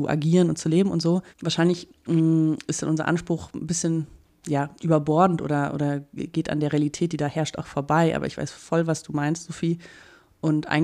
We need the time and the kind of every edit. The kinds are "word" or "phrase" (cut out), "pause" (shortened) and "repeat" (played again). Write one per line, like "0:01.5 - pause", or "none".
0:01.3 - pause